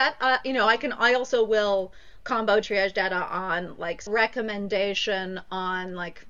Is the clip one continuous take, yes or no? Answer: no